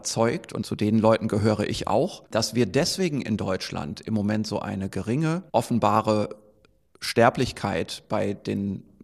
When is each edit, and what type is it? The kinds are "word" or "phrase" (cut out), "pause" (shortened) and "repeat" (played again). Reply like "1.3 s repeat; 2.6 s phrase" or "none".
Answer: 2.3 s pause; 5.5 s pause